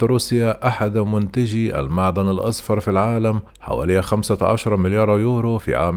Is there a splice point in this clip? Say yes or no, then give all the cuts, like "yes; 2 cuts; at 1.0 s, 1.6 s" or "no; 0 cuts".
yes; 1 cut; at 3.5 s